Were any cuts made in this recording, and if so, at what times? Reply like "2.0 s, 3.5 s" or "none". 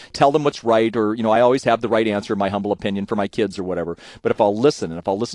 none

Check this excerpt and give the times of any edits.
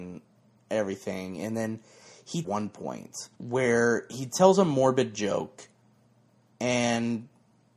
2.4 s, 3.4 s

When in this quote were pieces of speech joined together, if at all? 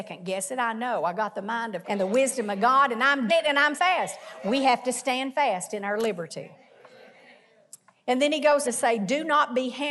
1.8 s, 3.3 s, 3.8 s, 8.6 s

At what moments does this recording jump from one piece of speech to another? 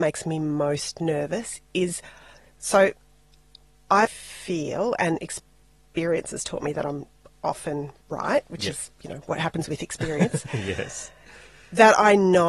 4.0 s

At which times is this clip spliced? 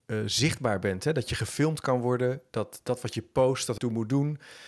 3.8 s

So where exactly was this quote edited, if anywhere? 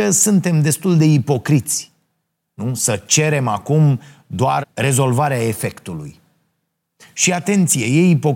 4.6 s

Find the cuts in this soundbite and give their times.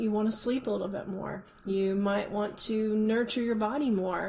none

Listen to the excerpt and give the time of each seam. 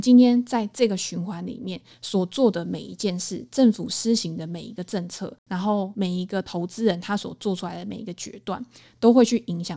none

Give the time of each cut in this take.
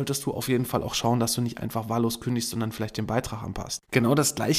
none

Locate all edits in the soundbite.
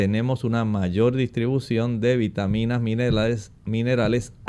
none

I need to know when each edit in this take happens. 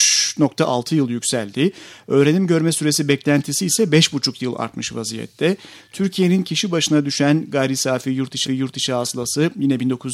8.5 s

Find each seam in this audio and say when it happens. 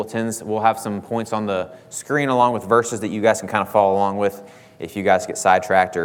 none

